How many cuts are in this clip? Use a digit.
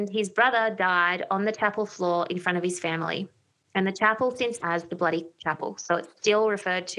1